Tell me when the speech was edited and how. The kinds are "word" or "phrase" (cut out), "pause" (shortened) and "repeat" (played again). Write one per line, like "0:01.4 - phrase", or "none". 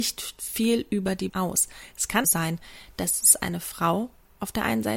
0:01.3 - word
0:02.2 - word